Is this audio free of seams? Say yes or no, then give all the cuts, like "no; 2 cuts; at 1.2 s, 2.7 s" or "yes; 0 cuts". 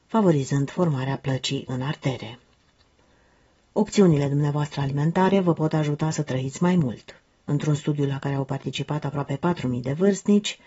no; 1 cut; at 7.3 s